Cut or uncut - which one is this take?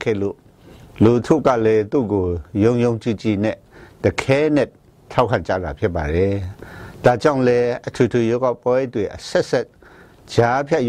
uncut